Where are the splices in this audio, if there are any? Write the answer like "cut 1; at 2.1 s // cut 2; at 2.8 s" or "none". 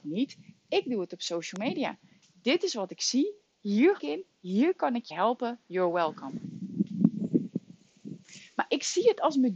cut 1; at 4.0 s // cut 2; at 5.1 s